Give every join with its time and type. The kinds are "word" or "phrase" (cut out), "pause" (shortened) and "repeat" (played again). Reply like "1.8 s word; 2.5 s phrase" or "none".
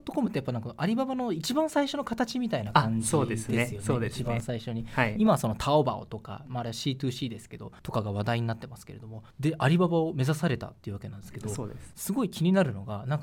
7.8 s pause; 9.3 s pause; 10.8 s pause